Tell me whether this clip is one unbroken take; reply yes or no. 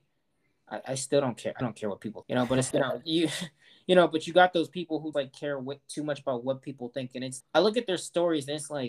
no